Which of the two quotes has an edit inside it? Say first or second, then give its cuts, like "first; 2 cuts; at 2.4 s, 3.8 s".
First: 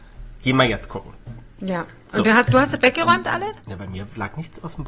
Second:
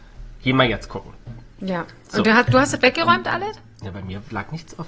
first; 1 cut; at 3.6 s